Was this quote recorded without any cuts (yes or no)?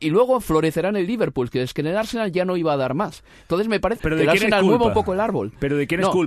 no